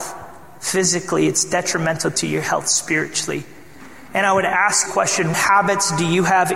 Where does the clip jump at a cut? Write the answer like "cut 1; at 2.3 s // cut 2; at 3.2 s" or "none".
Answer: cut 1; at 4.9 s // cut 2; at 5.3 s

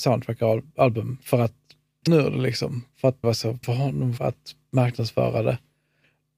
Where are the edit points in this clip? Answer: cut 1; at 2.1 s // cut 2; at 3.2 s // cut 3; at 3.6 s // cut 4; at 4.2 s

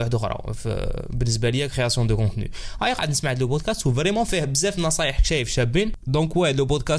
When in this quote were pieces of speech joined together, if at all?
none

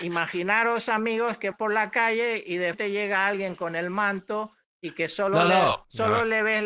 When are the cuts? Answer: cut 1; at 1.5 s // cut 2; at 2.7 s

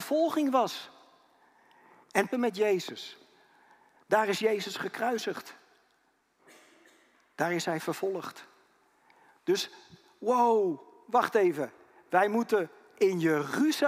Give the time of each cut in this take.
cut 1; at 2.3 s

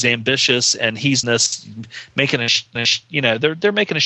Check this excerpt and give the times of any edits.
cut 1; at 1.2 s // cut 2; at 2.8 s

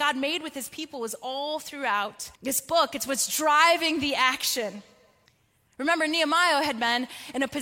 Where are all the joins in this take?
cut 1; at 2.4 s // cut 2; at 5.3 s

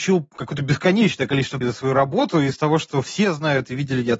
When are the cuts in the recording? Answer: cut 1; at 1.6 s

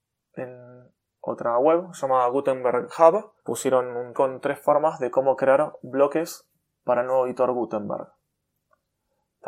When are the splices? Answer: cut 1; at 3.4 s // cut 2; at 4.1 s

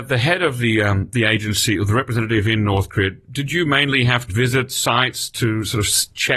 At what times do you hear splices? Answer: cut 1; at 4.3 s

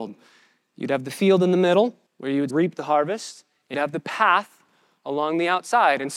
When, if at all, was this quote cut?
cut 1; at 2.1 s // cut 2; at 2.5 s // cut 3; at 3.7 s

